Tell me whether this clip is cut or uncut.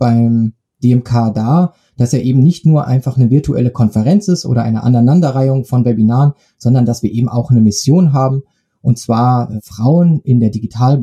uncut